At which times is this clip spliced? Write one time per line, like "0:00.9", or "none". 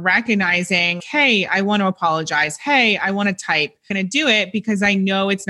0:01.0
0:03.9